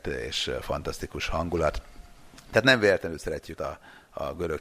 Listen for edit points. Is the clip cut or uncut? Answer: cut